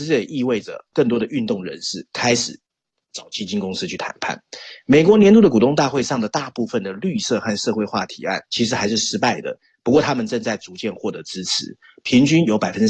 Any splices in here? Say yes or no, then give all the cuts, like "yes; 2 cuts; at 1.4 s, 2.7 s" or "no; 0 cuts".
yes; 1 cut; at 8.4 s